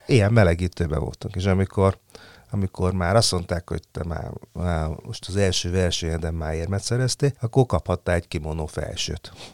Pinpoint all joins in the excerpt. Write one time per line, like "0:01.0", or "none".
0:07.4